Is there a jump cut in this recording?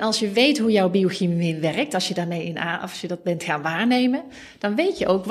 no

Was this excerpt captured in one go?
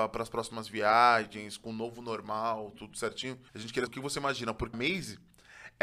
no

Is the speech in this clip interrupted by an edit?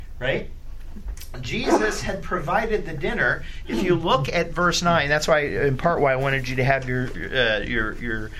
no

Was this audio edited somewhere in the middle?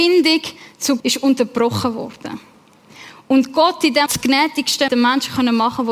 yes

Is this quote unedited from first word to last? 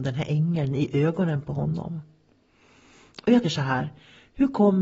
no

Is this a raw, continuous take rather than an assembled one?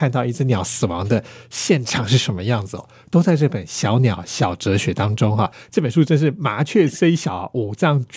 yes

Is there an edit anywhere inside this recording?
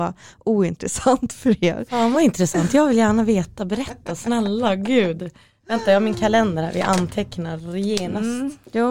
no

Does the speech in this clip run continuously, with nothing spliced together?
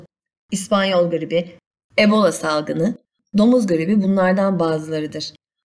yes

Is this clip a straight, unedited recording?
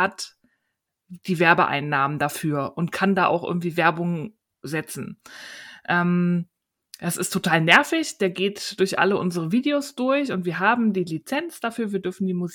yes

